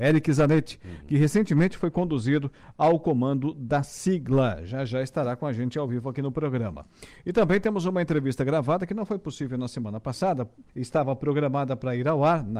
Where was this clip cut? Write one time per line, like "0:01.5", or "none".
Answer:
0:10.7